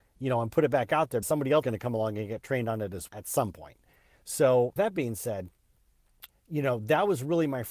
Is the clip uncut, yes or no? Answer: no